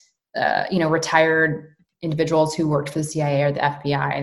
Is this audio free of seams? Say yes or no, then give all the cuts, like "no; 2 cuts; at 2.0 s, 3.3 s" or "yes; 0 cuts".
yes; 0 cuts